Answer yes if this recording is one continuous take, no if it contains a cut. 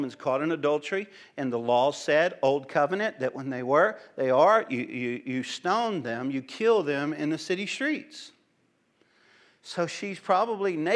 yes